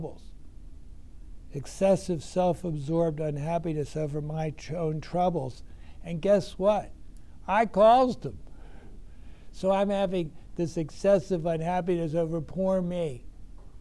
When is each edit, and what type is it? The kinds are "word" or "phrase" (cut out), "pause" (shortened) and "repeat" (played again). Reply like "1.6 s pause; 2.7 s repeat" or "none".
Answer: none